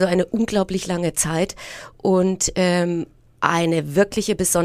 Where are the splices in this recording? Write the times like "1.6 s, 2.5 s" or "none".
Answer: none

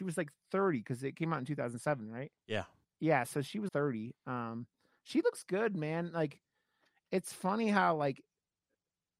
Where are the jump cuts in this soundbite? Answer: 2.8 s, 3.7 s

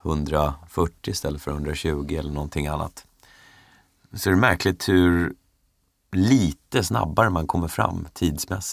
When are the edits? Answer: none

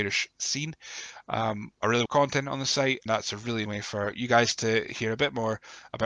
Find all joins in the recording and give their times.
1.7 s, 2.1 s, 3.1 s, 3.7 s

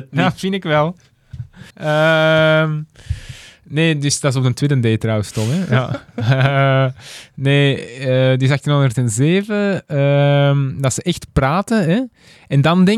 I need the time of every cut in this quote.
1.7 s

